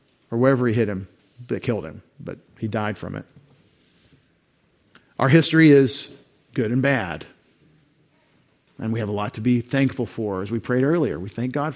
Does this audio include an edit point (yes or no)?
yes